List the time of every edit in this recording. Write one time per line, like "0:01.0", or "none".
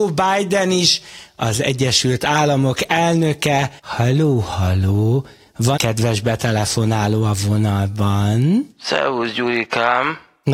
0:03.8
0:05.8
0:08.7